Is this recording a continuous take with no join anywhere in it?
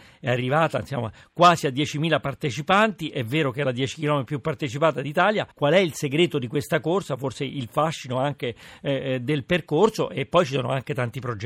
no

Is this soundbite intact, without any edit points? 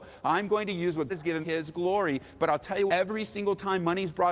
no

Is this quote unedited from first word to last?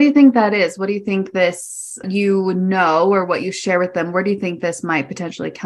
no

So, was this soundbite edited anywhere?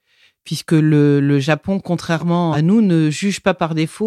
no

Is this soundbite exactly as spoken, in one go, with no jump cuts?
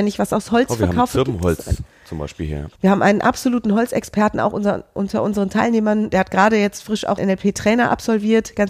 no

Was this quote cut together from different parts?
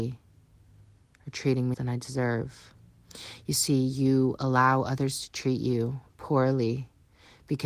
yes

